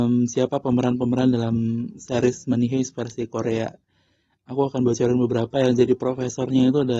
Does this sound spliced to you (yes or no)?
no